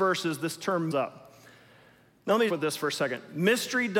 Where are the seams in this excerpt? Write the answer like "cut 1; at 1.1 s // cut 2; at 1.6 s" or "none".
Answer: cut 1; at 0.9 s // cut 2; at 2.5 s